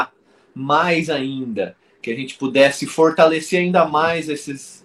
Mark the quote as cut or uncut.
uncut